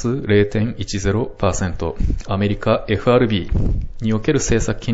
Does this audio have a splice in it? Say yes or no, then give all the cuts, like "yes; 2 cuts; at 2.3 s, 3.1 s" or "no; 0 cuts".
no; 0 cuts